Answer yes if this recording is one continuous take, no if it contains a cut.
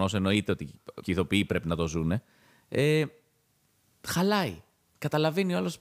no